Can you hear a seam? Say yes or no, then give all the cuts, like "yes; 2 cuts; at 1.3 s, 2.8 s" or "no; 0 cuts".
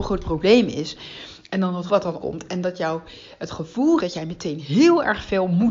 yes; 3 cuts; at 1.9 s, 2.2 s, 4.0 s